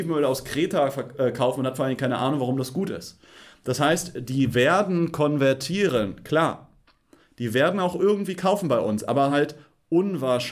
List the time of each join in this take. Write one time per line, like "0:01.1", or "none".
none